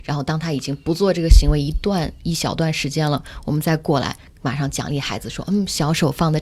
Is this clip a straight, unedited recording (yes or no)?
yes